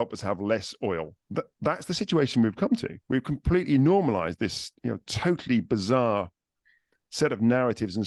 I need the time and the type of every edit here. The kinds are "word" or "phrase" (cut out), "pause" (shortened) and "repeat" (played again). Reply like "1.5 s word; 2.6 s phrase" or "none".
1.2 s pause; 3.0 s pause; 4.8 s pause

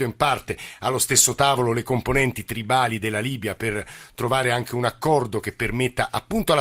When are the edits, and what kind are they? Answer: none

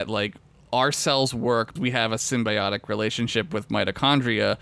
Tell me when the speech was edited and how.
1.8 s word

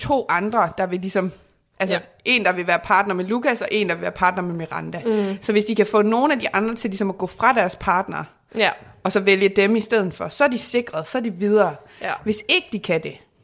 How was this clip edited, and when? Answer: none

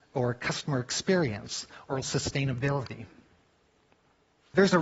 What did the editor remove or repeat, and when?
2.0 s word

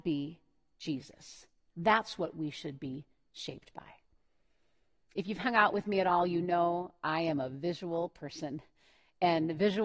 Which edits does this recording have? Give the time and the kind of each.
none

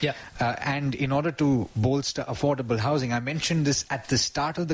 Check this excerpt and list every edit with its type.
none

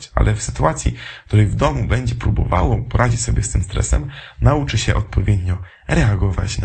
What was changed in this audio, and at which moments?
none

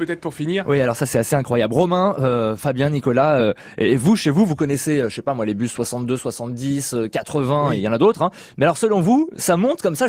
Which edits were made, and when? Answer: none

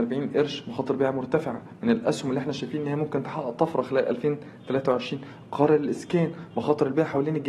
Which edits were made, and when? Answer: none

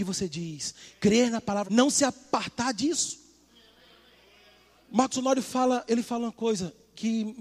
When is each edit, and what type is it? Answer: 1.7 s word

